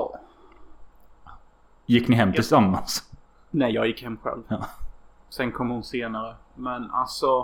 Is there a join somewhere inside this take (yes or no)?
no